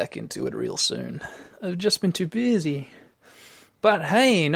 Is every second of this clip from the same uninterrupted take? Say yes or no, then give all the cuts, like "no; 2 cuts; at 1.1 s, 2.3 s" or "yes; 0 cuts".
yes; 0 cuts